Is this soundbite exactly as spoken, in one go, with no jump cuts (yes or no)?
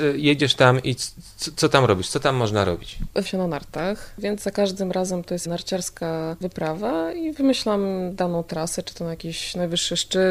no